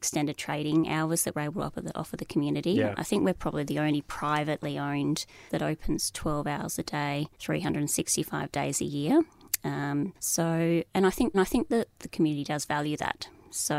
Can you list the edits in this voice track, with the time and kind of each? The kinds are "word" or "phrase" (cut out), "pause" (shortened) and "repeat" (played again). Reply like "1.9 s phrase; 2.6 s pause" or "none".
5.5 s phrase; 7.3 s pause; 10.2 s pause; 11.3 s repeat